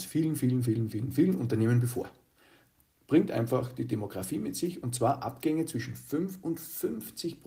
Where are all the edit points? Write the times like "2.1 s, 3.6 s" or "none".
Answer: none